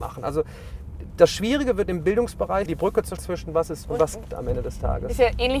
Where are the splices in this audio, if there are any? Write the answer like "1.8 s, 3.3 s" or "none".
1.1 s, 2.7 s, 3.2 s, 3.8 s, 4.3 s